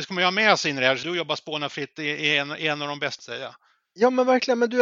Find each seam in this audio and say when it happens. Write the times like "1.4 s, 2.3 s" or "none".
1.0 s, 3.2 s